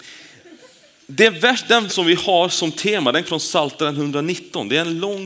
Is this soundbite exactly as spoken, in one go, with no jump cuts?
no; 2 cuts; at 1.9 s, 3.2 s

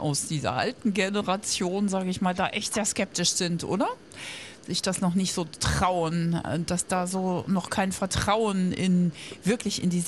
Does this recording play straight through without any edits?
yes; 0 cuts

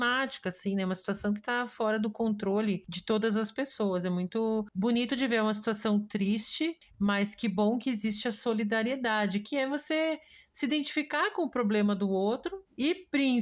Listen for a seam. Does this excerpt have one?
no; 0 cuts

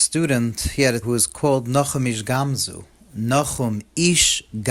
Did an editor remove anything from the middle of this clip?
yes; 1 cut; at 1.0 s

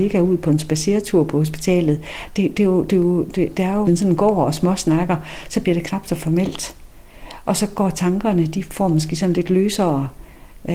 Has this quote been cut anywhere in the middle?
yes; 1 cut; at 3.8 s

